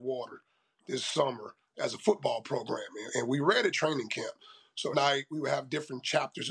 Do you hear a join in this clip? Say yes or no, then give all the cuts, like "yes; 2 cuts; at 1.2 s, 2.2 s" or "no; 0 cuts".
yes; 2 cuts; at 3.7 s, 4.9 s